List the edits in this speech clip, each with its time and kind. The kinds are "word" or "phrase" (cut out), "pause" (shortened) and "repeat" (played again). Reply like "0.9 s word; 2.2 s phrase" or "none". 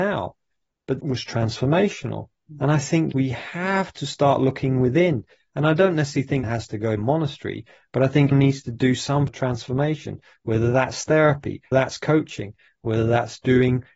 1.0 s word; 3.1 s word; 6.4 s word; 7.0 s word; 8.3 s word; 9.3 s word; 11.7 s word